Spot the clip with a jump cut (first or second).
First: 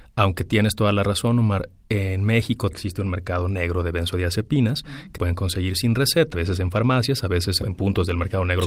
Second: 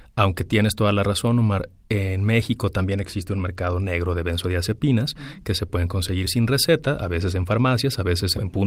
first